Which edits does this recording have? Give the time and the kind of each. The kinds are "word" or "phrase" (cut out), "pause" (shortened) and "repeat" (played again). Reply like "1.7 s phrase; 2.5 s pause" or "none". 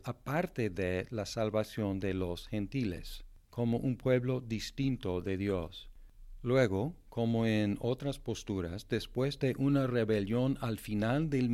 none